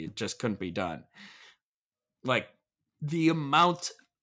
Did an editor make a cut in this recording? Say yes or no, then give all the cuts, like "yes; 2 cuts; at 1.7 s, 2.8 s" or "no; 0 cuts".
no; 0 cuts